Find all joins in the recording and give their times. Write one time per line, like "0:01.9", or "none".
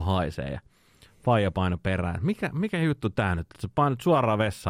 none